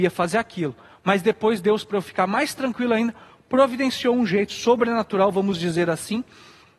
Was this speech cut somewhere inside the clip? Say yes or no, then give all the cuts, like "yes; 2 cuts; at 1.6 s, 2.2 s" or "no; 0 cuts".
no; 0 cuts